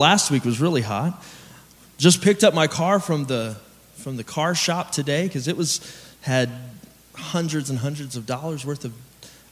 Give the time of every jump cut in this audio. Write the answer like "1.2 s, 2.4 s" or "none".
none